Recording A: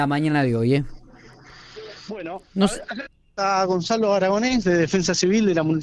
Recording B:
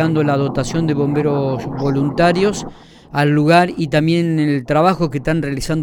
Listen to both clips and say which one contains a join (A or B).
A